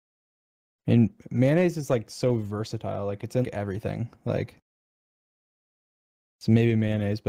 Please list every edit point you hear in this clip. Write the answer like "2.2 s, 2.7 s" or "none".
3.4 s